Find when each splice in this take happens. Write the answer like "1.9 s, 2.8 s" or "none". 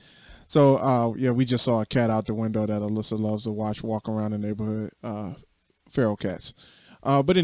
none